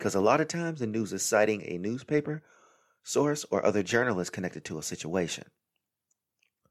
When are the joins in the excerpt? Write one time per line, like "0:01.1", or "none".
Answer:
none